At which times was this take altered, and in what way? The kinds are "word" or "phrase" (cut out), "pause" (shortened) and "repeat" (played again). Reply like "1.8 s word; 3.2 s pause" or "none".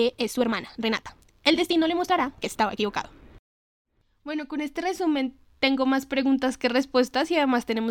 none